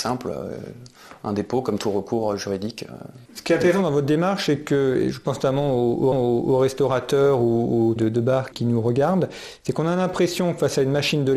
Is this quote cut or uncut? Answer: cut